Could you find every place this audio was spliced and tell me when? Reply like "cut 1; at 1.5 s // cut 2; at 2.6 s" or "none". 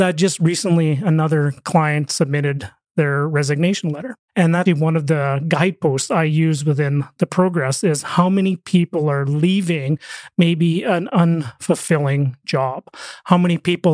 cut 1; at 4.7 s